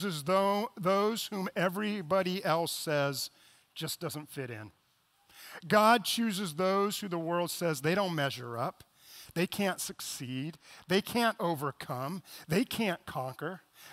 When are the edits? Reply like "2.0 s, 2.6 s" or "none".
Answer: none

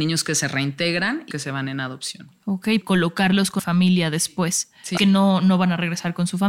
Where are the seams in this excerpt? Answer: 1.3 s, 2.8 s, 3.6 s, 5.0 s

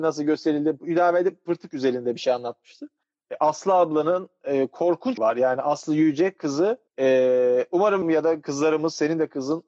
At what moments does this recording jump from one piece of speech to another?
5.2 s, 6.9 s, 8.0 s

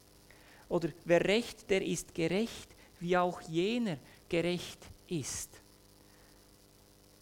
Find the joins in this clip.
1.7 s

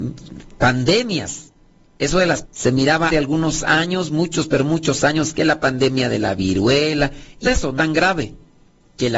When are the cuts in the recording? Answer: 2.4 s, 3.1 s, 7.4 s, 7.8 s

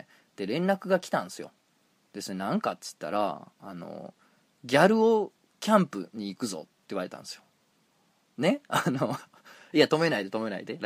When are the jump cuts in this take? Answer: none

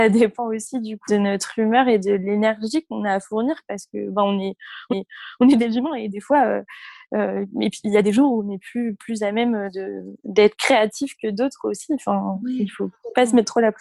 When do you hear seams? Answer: 1.1 s, 4.9 s

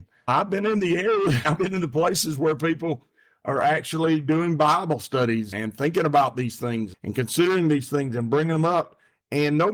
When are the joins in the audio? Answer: none

